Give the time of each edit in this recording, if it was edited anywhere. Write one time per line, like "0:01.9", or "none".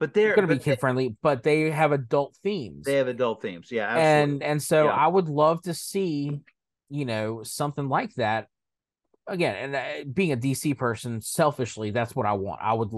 none